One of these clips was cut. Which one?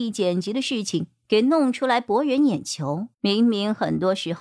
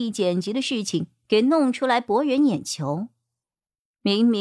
first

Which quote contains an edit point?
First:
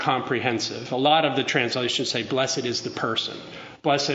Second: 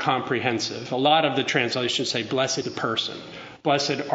second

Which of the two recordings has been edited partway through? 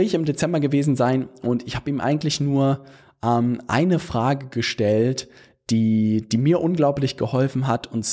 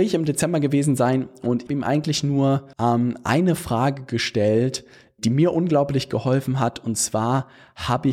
second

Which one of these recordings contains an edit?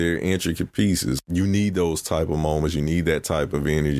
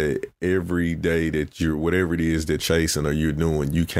second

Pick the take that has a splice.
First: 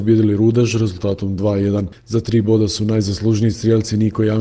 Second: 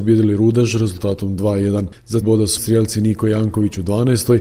second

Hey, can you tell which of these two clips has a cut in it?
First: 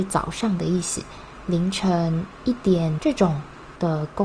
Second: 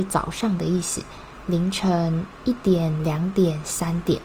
first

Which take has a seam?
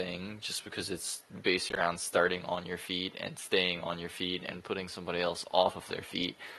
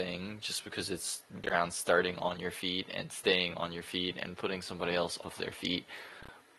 second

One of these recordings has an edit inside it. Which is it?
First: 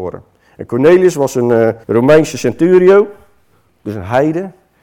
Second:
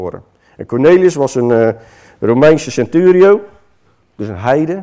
first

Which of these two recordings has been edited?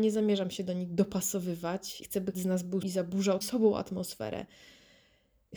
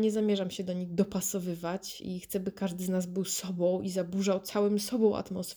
first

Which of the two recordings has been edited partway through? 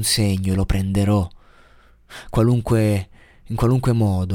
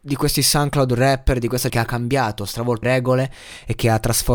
second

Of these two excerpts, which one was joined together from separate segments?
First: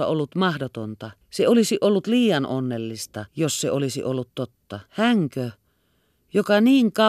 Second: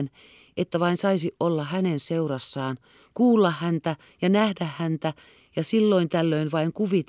first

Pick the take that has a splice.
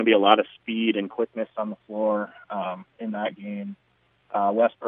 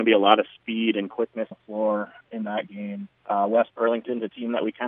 second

